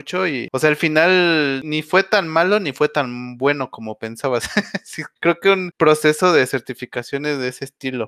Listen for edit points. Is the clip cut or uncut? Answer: uncut